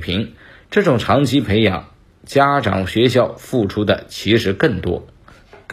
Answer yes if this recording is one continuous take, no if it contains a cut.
yes